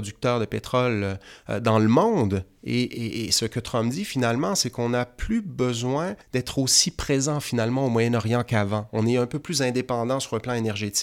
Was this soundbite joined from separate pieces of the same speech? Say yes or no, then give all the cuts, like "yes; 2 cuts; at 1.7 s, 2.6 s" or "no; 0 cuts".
yes; 1 cut; at 6.2 s